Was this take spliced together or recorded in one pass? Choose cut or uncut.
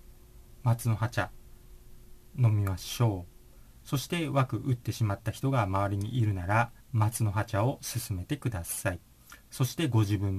cut